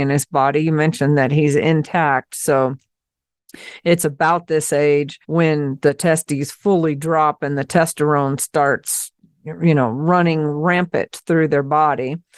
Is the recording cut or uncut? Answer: cut